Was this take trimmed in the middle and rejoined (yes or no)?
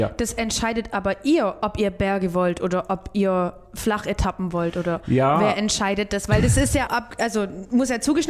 yes